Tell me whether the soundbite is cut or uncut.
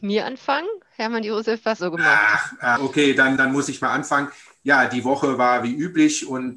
cut